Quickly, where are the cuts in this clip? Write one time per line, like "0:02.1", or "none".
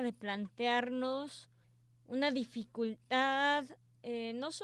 0:01.6